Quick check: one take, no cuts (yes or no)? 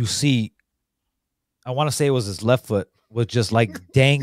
yes